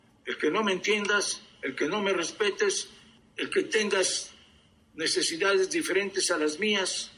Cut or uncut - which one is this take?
uncut